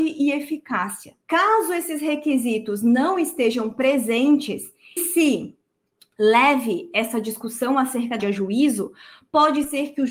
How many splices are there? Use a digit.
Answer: 3